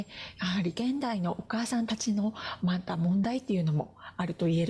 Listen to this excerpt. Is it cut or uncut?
uncut